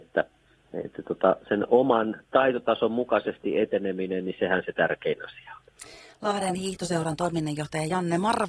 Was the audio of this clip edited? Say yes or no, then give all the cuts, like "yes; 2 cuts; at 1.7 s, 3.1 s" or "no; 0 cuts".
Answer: no; 0 cuts